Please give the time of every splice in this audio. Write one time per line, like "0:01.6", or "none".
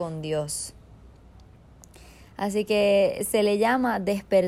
none